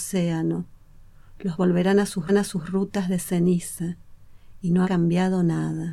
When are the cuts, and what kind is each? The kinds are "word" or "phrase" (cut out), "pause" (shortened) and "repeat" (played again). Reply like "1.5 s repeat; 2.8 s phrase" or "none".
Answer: 1.5 s word; 2.3 s repeat; 4.8 s word